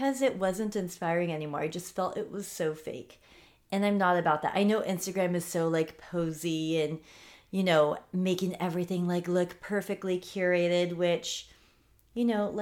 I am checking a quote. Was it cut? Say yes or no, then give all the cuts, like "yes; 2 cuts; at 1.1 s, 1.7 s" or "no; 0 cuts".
no; 0 cuts